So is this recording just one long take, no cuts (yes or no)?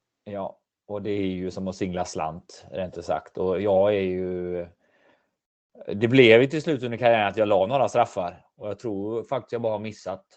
yes